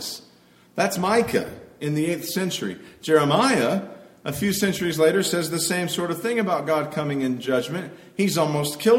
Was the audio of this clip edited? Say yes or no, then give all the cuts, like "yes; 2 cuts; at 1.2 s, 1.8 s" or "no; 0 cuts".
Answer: no; 0 cuts